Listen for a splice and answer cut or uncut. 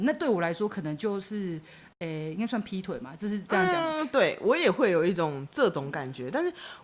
uncut